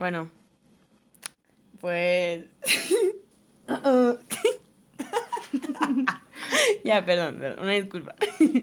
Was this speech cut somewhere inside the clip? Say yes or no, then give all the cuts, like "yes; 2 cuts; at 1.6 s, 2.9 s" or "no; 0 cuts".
no; 0 cuts